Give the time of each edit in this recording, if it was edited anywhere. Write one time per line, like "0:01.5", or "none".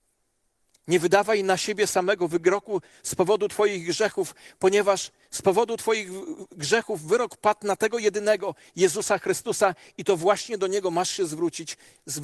none